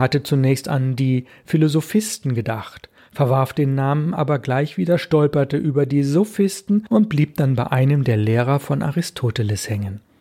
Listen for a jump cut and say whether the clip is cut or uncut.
uncut